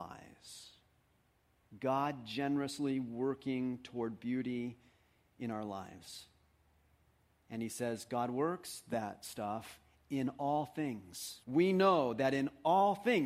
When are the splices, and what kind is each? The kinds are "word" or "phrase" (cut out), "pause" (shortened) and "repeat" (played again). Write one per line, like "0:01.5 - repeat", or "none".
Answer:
0:11.4 - pause